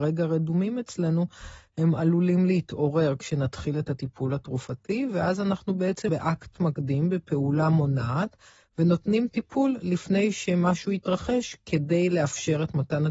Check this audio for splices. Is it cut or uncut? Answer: cut